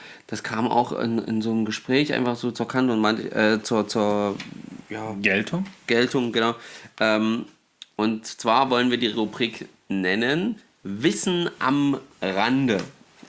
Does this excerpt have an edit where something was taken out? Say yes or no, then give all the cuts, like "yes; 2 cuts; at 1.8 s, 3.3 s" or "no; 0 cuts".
yes; 2 cuts; at 3.6 s, 7.9 s